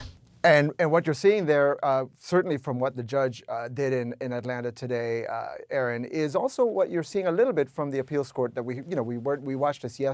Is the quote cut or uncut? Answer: uncut